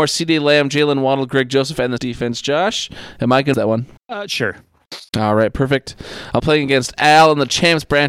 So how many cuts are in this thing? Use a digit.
5